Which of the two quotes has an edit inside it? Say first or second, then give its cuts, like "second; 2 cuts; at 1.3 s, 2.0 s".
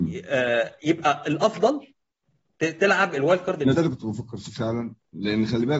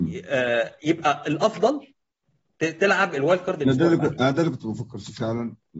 first; 1 cut; at 3.7 s